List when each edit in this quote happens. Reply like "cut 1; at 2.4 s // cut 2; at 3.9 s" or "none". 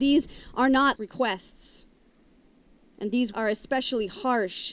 cut 1; at 1.0 s // cut 2; at 3.3 s